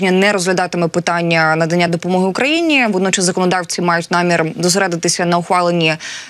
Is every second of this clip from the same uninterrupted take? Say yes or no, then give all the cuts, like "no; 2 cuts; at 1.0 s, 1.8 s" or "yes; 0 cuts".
yes; 0 cuts